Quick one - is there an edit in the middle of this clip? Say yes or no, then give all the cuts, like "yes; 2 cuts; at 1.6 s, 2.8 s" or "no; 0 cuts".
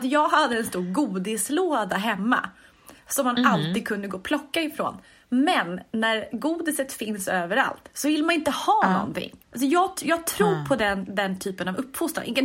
yes; 1 cut; at 9.4 s